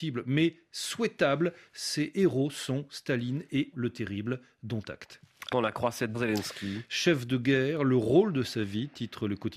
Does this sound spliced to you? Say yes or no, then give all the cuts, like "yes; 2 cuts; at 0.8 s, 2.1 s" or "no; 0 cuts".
yes; 3 cuts; at 3.7 s, 5.5 s, 6.1 s